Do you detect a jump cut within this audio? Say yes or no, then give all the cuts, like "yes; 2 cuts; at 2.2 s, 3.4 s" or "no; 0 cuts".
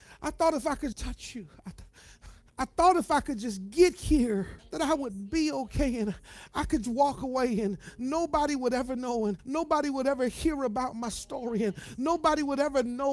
yes; 5 cuts; at 0.9 s, 2.5 s, 4.6 s, 6.8 s, 9.4 s